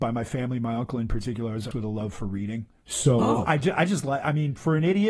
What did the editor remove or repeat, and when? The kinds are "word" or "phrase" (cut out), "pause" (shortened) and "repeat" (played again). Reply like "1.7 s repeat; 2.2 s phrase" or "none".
1.7 s phrase; 2.8 s pause